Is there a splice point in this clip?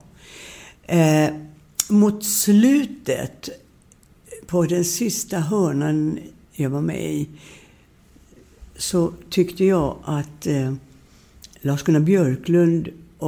yes; 1 cut; at 11.5 s

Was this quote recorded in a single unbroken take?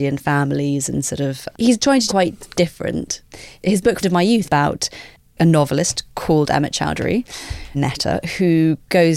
no; 6 cuts; at 1.5 s, 2.1 s, 2.5 s, 4.0 s, 4.4 s, 7.7 s

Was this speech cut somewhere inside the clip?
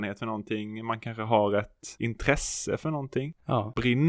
no; 0 cuts

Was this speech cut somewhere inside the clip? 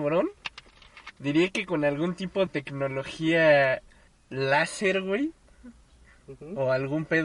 yes; 2 cuts; at 2.5 s, 4.1 s

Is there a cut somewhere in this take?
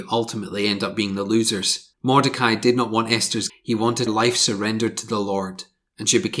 yes; 3 cuts; at 1.9 s, 3.5 s, 4.1 s

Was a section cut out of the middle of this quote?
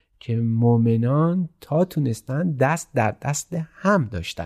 no; 0 cuts

